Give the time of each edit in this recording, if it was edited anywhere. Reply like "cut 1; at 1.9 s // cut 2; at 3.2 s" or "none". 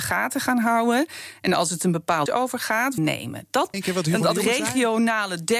cut 1; at 2.3 s // cut 2; at 3.0 s // cut 3; at 3.7 s